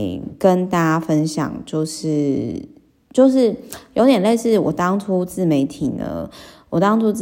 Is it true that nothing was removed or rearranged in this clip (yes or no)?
yes